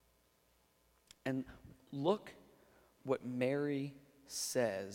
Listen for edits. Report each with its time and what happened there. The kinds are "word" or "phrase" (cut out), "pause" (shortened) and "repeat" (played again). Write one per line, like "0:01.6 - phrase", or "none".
none